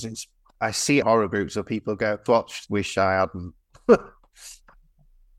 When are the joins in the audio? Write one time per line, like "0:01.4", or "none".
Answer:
0:01.0
0:02.3
0:02.7